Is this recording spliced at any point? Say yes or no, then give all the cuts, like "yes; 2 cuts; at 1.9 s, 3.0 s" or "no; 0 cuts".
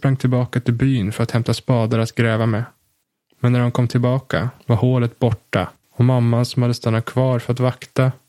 yes; 3 cuts; at 3.0 s, 4.6 s, 5.8 s